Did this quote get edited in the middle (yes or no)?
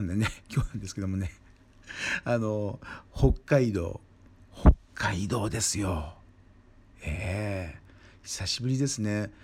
no